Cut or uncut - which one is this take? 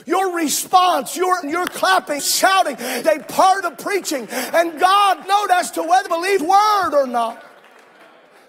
cut